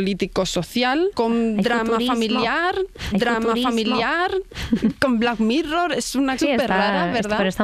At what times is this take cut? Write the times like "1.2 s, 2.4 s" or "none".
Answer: 1.1 s, 3.1 s, 6.4 s